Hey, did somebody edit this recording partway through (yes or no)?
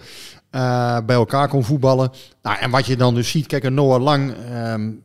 no